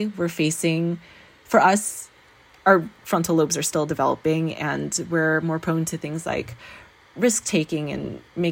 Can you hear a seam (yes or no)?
no